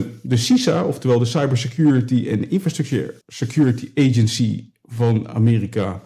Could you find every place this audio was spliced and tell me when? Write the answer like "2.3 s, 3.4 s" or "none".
3.2 s